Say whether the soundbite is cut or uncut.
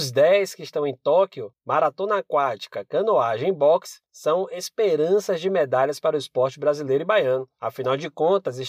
uncut